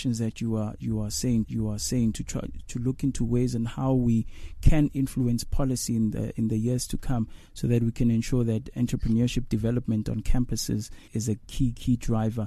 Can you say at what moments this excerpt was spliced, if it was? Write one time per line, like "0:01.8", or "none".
0:01.4
0:08.7
0:11.1
0:11.4

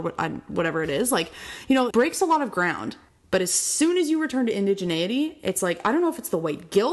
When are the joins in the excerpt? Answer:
0:01.9
0:03.1

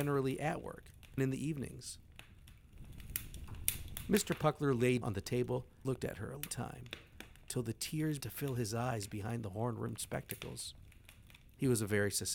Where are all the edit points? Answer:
0:01.2
0:05.0
0:05.8
0:06.5
0:08.2

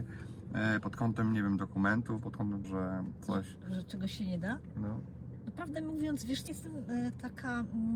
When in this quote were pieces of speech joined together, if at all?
0:02.6
0:06.5

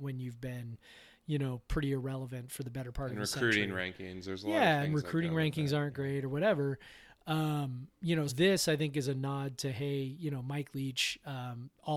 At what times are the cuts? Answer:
0:07.9
0:08.3

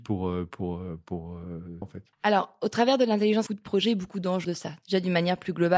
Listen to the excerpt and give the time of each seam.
0:01.8
0:02.1
0:03.5
0:04.4

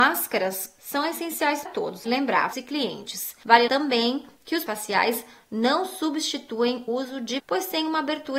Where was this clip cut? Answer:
0:01.7
0:02.1
0:02.5
0:03.7
0:04.7
0:06.9
0:07.4

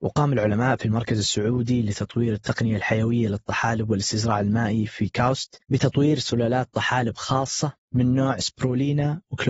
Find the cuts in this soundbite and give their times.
0:05.6

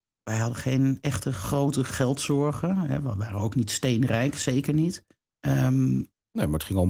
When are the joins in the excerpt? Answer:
0:05.2

